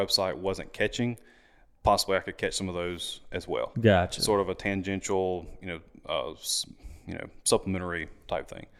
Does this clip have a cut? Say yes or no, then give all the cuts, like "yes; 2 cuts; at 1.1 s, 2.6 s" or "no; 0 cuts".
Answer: no; 0 cuts